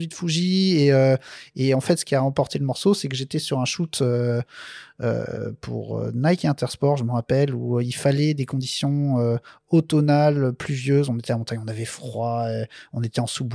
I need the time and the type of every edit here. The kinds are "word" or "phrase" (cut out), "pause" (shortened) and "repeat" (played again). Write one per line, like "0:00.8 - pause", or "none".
none